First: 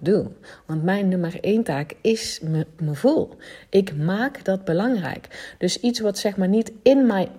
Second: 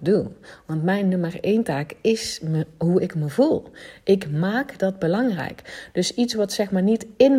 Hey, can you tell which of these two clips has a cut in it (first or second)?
first